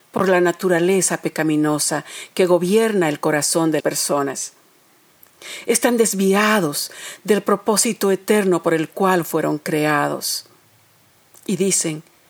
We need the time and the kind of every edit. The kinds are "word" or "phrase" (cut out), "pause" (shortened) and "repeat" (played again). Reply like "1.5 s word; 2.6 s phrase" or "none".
3.8 s word